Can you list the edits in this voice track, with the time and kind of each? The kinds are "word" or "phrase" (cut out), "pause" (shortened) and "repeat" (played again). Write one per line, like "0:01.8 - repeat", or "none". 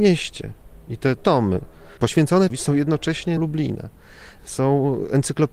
0:01.2 - word
0:02.5 - word
0:03.4 - word